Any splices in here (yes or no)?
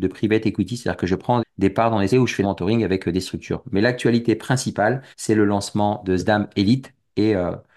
yes